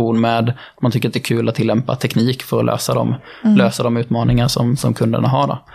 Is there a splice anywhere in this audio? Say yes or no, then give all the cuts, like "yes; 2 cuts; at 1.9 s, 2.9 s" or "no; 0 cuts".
no; 0 cuts